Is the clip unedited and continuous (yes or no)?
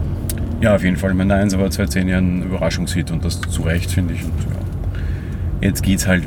yes